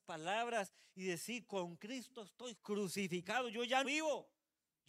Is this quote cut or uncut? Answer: cut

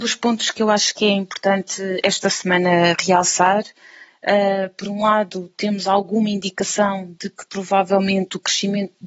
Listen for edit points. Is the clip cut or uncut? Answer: uncut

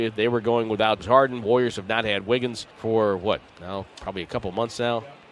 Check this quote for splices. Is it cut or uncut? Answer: cut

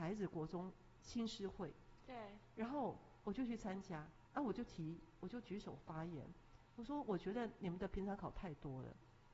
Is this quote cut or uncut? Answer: cut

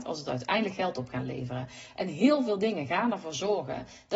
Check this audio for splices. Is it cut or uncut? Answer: uncut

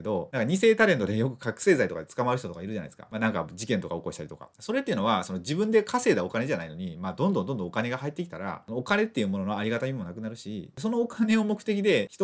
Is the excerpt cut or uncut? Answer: uncut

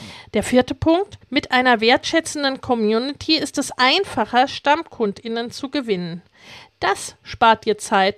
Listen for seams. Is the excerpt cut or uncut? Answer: cut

